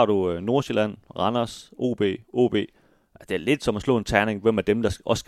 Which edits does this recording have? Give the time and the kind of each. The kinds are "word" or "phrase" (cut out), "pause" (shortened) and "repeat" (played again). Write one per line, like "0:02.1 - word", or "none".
none